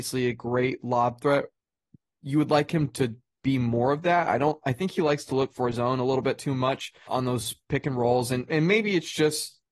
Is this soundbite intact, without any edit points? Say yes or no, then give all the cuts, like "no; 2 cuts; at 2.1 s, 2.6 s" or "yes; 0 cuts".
no; 1 cut; at 7.1 s